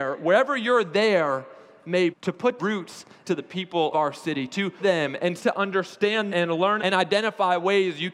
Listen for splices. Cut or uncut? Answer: cut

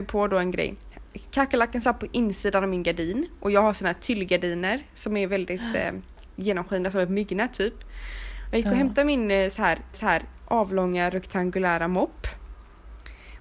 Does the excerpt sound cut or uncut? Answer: cut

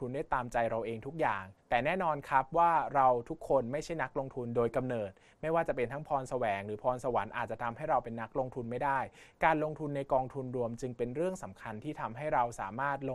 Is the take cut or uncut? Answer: cut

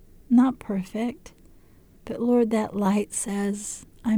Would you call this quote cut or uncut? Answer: uncut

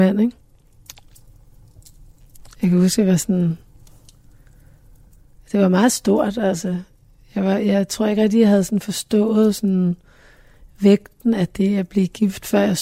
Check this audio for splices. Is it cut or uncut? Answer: uncut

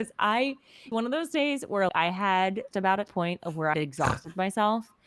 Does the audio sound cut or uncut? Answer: cut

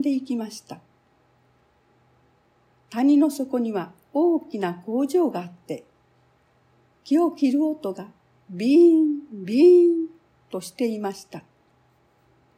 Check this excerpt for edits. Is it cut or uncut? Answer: uncut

